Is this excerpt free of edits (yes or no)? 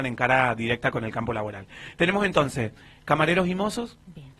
yes